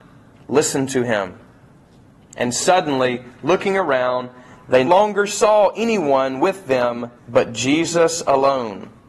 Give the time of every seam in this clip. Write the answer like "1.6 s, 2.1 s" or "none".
4.9 s, 7.2 s